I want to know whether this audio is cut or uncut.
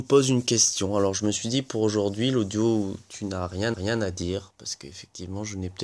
cut